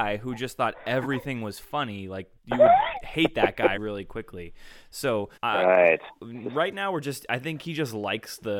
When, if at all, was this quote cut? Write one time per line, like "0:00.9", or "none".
0:02.4
0:03.8
0:05.4